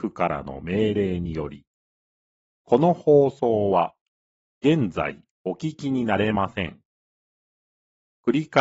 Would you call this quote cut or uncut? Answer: uncut